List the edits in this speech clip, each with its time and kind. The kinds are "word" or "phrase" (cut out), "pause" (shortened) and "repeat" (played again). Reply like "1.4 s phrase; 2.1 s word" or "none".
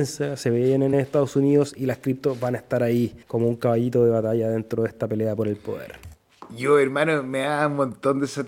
0.9 s word; 3.2 s pause